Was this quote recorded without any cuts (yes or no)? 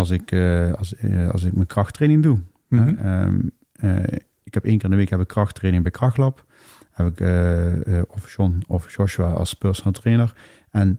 yes